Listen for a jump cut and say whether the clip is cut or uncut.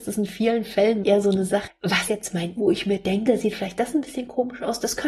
cut